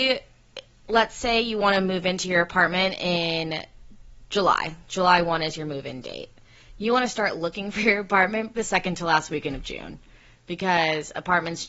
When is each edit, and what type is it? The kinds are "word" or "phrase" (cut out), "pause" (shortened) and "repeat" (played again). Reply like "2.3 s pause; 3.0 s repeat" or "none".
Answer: 8.6 s word